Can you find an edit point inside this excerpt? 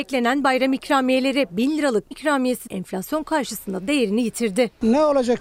yes; 2 cuts; at 2.1 s, 2.7 s

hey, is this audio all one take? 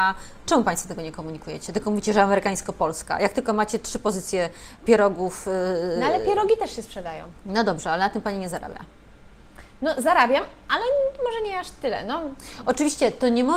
yes; 0 cuts

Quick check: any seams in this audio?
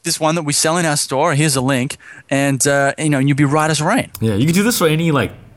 no; 0 cuts

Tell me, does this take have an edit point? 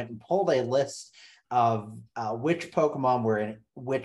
no; 0 cuts

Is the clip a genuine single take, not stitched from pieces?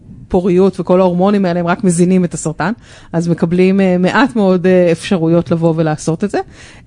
yes; 0 cuts

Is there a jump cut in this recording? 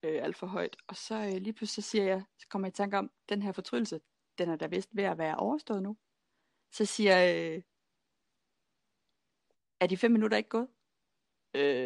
no; 0 cuts

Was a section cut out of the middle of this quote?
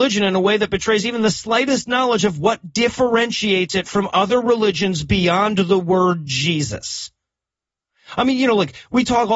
no; 0 cuts

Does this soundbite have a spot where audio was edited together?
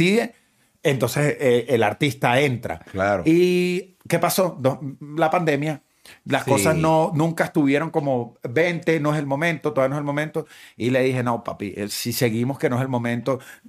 no; 0 cuts

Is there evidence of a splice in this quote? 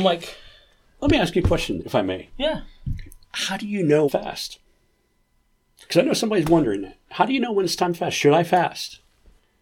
yes; 3 cuts; at 1.8 s, 3.2 s, 4.1 s

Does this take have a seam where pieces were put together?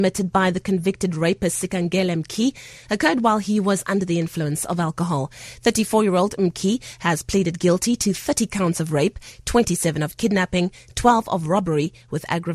no; 0 cuts

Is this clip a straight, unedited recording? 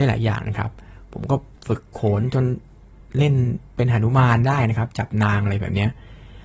no; 2 cuts; at 1.6 s, 3.7 s

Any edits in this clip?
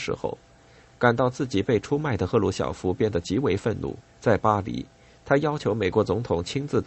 yes; 1 cut; at 4.1 s

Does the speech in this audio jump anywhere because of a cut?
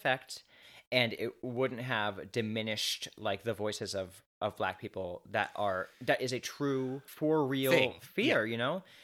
no; 0 cuts

